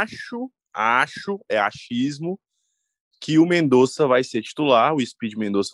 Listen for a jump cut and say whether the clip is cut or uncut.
uncut